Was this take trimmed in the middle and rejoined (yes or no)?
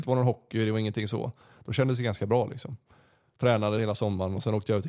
no